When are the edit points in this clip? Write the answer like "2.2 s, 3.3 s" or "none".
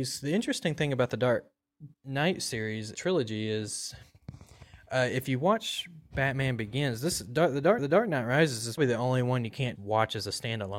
1.9 s, 2.9 s, 7.8 s, 8.8 s, 9.8 s